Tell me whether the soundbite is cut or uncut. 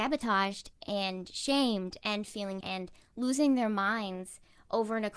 cut